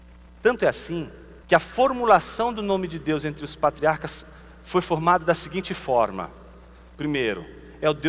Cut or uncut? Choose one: cut